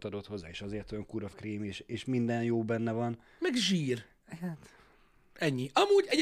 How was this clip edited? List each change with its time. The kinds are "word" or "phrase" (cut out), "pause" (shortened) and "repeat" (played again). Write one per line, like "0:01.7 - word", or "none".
0:01.3 - word